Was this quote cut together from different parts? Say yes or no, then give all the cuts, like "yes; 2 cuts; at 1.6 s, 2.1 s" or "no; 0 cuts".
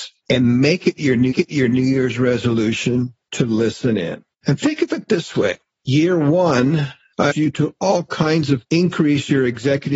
yes; 4 cuts; at 1.3 s, 4.3 s, 7.3 s, 8.7 s